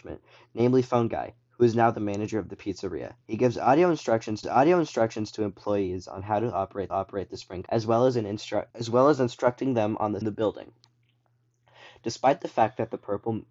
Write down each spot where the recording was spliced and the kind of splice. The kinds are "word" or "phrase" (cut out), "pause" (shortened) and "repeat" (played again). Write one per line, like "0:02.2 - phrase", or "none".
0:03.2 - pause
0:04.4 - repeat
0:06.9 - repeat
0:07.7 - word
0:08.7 - pause
0:10.2 - phrase